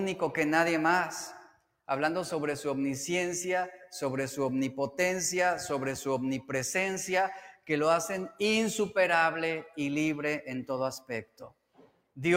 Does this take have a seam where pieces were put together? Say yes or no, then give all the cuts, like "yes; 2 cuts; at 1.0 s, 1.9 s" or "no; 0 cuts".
no; 0 cuts